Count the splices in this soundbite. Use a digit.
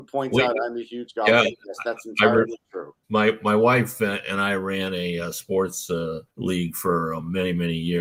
2